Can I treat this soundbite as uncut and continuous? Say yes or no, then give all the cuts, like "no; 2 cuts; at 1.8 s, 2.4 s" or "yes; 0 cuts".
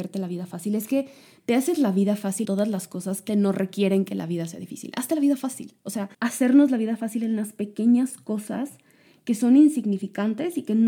no; 3 cuts; at 2.4 s, 3.3 s, 6.1 s